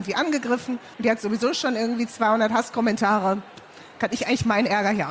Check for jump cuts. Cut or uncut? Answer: cut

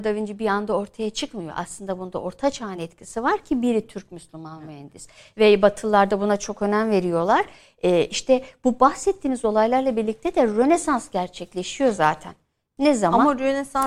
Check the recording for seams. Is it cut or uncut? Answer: uncut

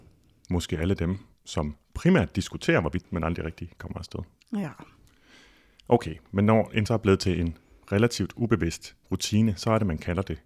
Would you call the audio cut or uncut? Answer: cut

